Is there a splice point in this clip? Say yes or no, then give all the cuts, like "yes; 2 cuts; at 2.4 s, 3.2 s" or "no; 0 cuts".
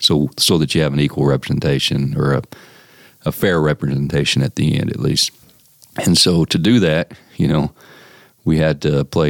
no; 0 cuts